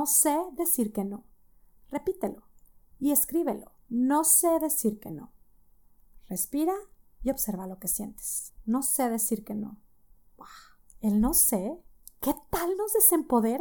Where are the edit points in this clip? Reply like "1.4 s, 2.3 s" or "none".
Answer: 3.8 s

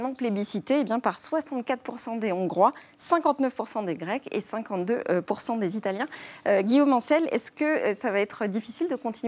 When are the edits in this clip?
none

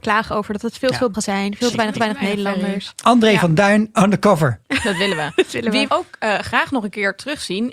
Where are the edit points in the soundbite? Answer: 1.1 s, 1.9 s, 3.9 s, 4.6 s, 5.9 s

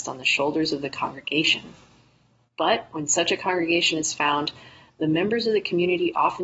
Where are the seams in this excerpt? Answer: none

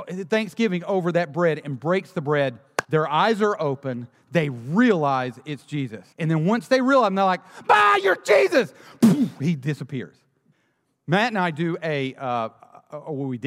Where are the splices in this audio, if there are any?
2.8 s, 6.1 s, 10.5 s

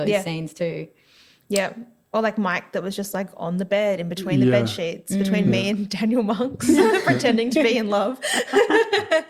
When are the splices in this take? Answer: none

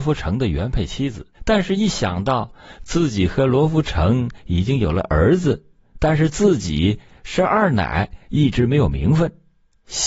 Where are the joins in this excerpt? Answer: 1.3 s

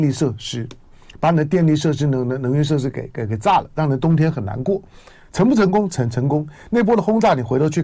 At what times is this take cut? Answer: none

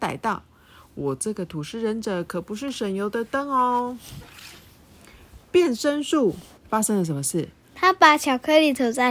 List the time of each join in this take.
6.6 s

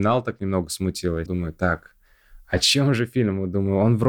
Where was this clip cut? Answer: 1.3 s

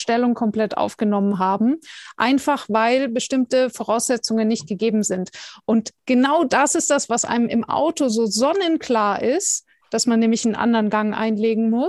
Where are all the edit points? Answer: none

